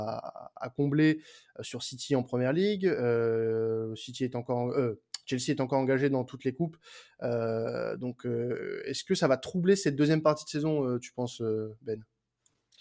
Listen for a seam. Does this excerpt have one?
no; 0 cuts

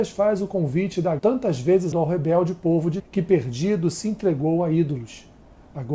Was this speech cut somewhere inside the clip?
yes; 3 cuts; at 1.2 s, 1.9 s, 3.0 s

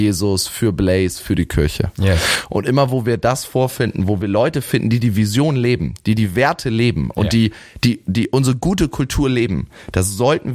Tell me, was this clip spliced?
no; 0 cuts

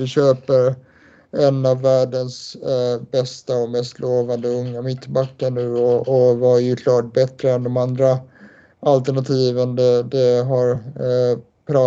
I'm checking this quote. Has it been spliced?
no; 0 cuts

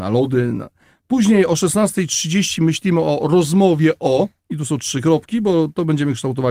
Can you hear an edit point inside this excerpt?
yes; 1 cut; at 4.4 s

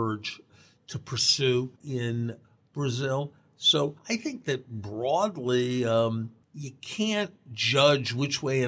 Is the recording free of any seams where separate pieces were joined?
no; 3 cuts; at 1.8 s, 4.0 s, 6.4 s

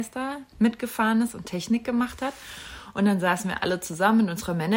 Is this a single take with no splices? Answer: yes; 0 cuts

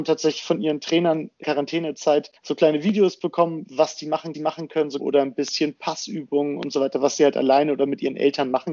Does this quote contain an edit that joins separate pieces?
yes; 4 cuts; at 1.4 s, 2.4 s, 4.3 s, 5.0 s

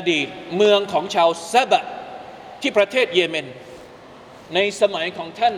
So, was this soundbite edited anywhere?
no; 0 cuts

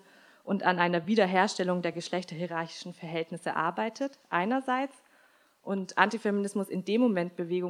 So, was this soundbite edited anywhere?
no; 0 cuts

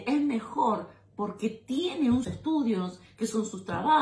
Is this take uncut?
no; 1 cut; at 2.2 s

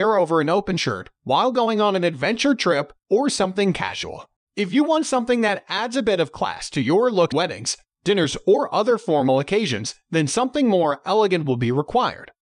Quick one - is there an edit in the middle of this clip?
yes; 1 cut; at 7.3 s

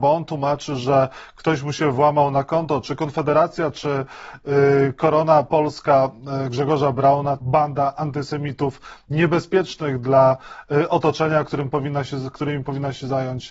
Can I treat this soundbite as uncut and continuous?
no; 1 cut; at 7.4 s

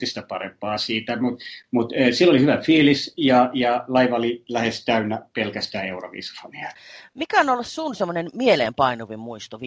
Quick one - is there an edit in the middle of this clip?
no; 0 cuts

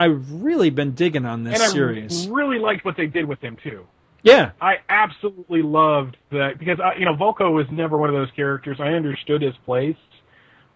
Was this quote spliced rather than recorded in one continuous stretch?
no; 0 cuts

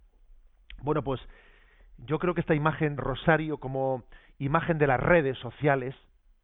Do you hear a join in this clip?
yes; 1 cut; at 3.0 s

